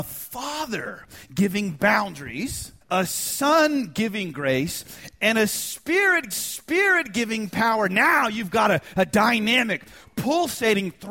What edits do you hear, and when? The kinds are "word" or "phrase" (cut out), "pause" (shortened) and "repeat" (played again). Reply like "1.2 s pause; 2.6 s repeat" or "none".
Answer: 2.8 s pause; 6.3 s repeat